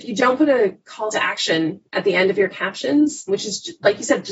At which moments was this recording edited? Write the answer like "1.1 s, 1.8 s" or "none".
3.3 s

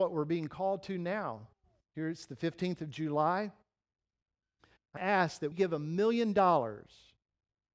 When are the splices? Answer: 5.0 s, 5.5 s

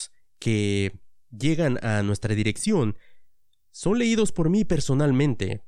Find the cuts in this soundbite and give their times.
none

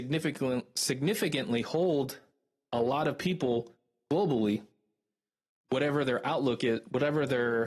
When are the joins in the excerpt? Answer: none

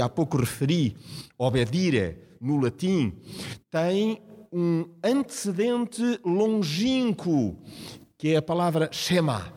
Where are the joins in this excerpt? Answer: none

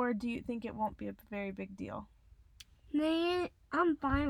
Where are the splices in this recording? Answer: none

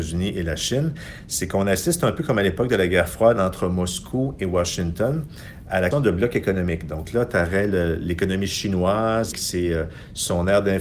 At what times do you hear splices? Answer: 5.9 s, 9.3 s

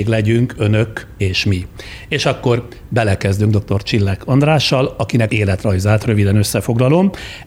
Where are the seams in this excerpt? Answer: 5.3 s

